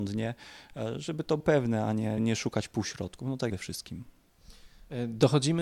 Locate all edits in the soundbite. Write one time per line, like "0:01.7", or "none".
0:01.4
0:02.2
0:03.5